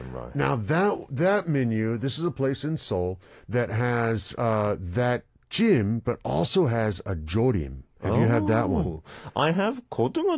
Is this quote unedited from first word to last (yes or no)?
yes